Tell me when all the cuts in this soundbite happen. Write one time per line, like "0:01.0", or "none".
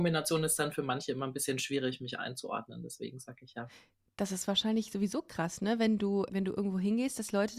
0:06.3